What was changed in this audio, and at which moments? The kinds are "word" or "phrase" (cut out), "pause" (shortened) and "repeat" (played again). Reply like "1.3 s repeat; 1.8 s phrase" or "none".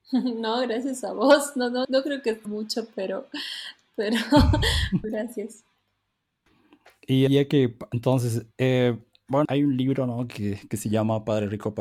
1.8 s word; 2.4 s word; 5.0 s word; 7.3 s word; 9.4 s word